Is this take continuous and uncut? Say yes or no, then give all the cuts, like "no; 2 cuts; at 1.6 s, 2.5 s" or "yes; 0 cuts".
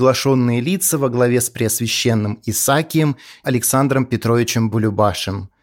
no; 1 cut; at 3.4 s